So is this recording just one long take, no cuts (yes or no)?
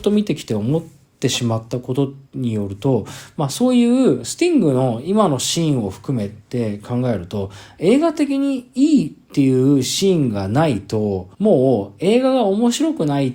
no